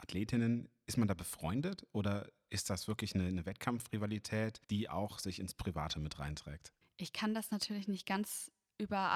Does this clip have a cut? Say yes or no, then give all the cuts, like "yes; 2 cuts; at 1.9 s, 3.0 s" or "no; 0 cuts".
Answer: yes; 2 cuts; at 4.6 s, 6.8 s